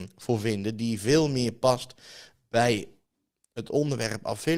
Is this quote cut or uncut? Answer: uncut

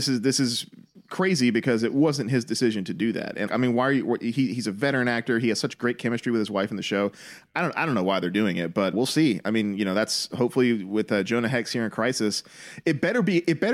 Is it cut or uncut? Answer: cut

